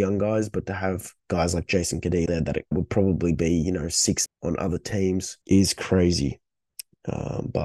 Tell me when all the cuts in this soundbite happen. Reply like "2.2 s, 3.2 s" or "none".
1.2 s, 2.3 s, 2.7 s, 4.3 s, 5.4 s